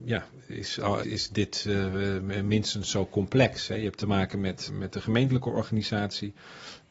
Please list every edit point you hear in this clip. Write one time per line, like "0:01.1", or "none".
0:01.0
0:04.7